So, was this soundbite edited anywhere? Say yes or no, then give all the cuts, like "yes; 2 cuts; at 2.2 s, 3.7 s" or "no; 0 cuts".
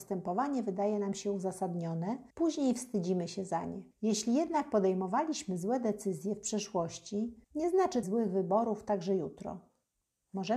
yes; 4 cuts; at 2.3 s, 3.9 s, 7.4 s, 8.0 s